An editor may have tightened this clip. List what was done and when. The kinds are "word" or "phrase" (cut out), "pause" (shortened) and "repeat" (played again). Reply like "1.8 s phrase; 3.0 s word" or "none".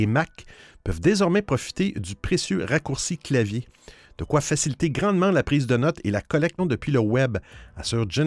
6.6 s word